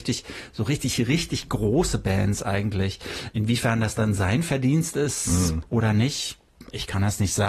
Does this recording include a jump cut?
no; 0 cuts

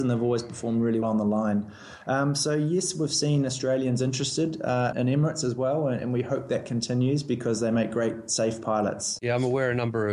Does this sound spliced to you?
yes; 2 cuts; at 1.0 s, 4.9 s

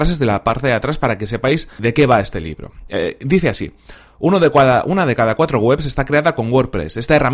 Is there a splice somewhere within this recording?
yes; 1 cut; at 1.8 s

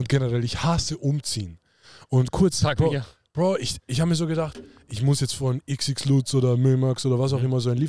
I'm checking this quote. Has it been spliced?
no; 0 cuts

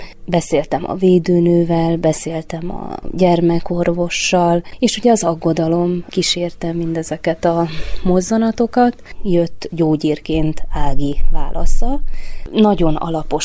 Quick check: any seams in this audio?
no; 0 cuts

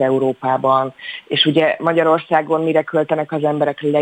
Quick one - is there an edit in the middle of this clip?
no; 0 cuts

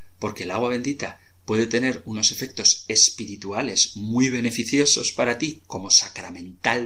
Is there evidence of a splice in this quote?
no; 0 cuts

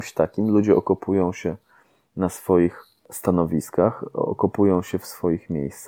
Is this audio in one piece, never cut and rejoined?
yes; 0 cuts

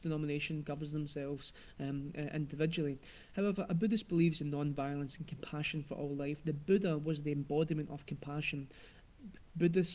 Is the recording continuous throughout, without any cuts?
yes; 0 cuts

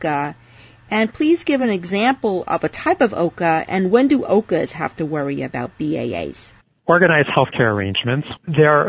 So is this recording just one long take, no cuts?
yes; 0 cuts

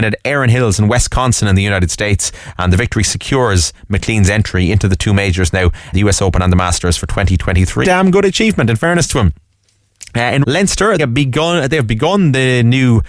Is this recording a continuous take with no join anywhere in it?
no; 4 cuts; at 5.9 s, 7.8 s, 10.4 s, 11.0 s

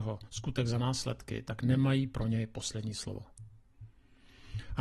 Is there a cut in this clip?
no; 0 cuts

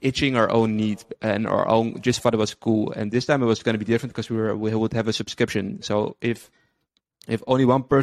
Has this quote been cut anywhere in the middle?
no; 0 cuts

